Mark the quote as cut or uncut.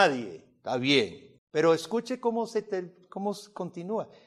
cut